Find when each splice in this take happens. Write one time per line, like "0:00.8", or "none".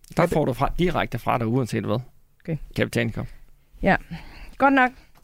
0:02.8

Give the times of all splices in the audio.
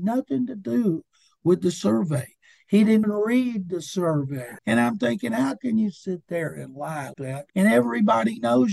0:03.0
0:04.6
0:07.1
0:07.5

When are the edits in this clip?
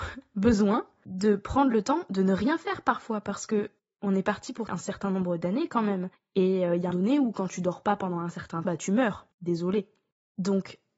0:03.8
0:04.7
0:06.1
0:06.9
0:08.6
0:09.3

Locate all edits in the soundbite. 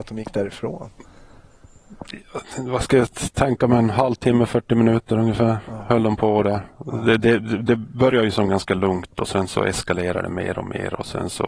none

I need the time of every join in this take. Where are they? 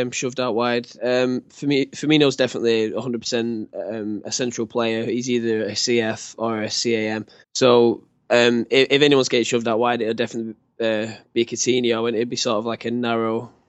0:01.0
0:07.4

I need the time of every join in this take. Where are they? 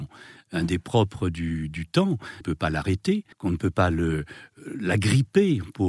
0:02.4
0:03.3

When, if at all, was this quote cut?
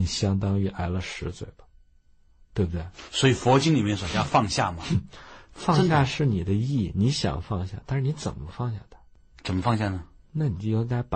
none

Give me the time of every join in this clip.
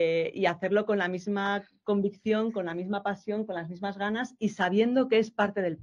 none

